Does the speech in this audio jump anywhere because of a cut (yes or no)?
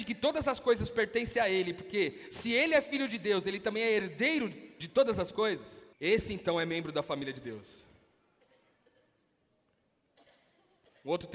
yes